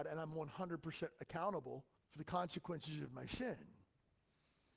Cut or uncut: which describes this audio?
cut